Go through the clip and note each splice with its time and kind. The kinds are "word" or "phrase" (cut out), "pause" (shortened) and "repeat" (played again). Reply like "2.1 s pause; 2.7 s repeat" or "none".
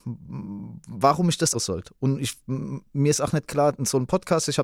1.5 s word